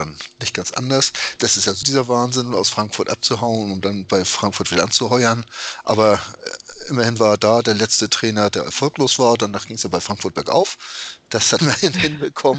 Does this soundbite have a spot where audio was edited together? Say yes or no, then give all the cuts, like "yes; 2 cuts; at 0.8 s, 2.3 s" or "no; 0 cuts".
yes; 2 cuts; at 1.8 s, 11.6 s